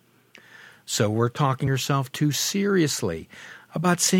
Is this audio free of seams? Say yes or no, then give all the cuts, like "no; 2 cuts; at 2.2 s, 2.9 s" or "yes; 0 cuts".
no; 1 cut; at 1.7 s